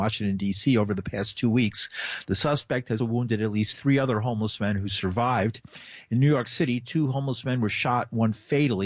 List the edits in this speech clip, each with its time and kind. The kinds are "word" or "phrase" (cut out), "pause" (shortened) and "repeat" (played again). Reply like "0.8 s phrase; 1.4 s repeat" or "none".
3.0 s word